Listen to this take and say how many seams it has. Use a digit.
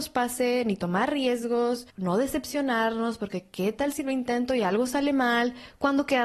1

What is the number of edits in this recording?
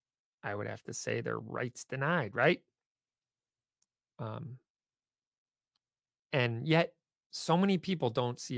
1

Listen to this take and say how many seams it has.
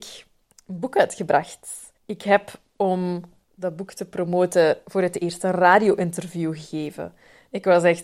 1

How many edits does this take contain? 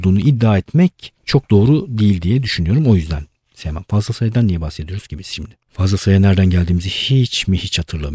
2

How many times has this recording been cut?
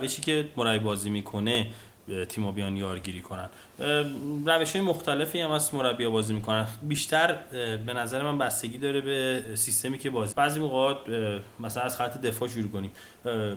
1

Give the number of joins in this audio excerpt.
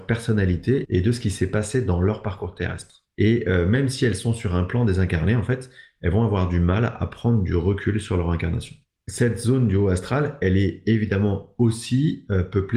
2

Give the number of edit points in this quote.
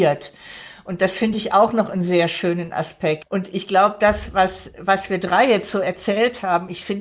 0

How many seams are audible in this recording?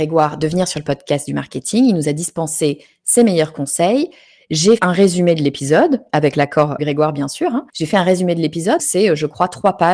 4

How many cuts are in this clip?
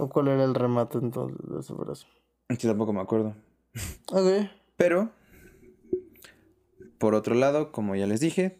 0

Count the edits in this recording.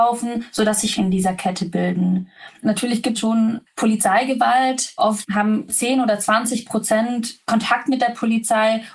3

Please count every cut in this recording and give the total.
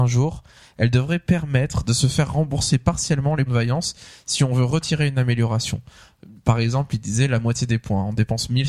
1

